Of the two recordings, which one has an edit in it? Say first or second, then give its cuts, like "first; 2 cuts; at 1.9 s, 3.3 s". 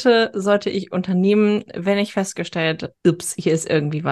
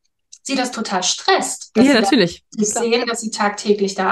first; 1 cut; at 2.9 s